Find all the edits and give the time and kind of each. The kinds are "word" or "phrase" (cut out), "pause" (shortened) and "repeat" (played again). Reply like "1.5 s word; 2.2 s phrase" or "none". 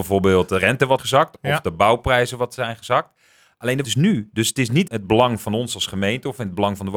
1.0 s word; 3.8 s word; 4.9 s word